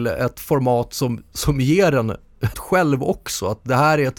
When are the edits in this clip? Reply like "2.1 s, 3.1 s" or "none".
2.5 s